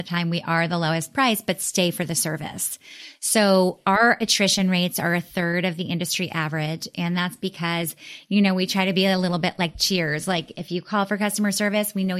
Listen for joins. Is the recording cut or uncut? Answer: uncut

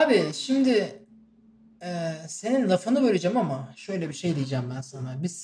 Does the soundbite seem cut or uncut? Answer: uncut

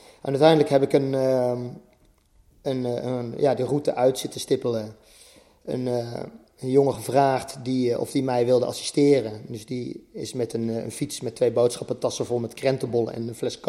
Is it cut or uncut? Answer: uncut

